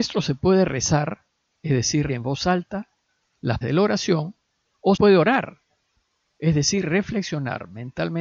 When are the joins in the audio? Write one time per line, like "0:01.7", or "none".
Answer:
0:02.1
0:03.6
0:05.0